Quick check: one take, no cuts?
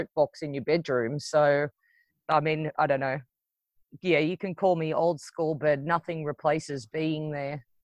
yes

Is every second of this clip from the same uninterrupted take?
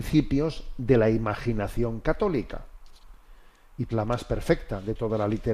no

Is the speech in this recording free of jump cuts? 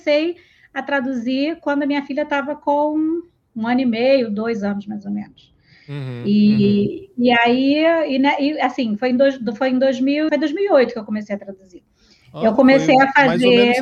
no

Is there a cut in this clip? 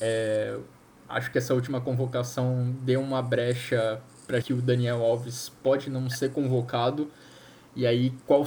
yes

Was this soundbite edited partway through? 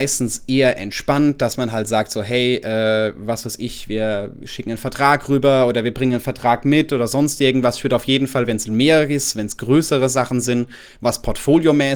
no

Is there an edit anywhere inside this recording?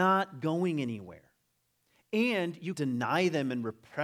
yes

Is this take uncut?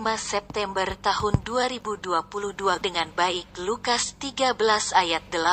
no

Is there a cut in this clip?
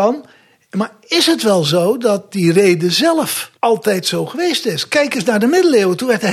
yes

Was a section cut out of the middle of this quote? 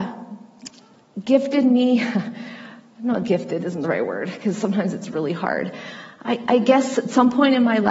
no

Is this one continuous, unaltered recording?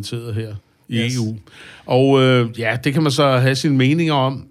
yes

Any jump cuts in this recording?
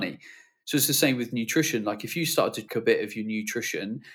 yes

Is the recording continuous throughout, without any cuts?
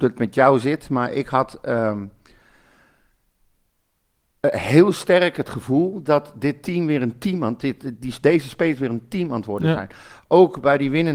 yes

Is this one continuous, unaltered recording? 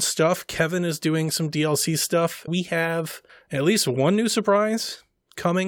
no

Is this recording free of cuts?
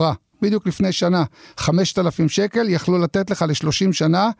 yes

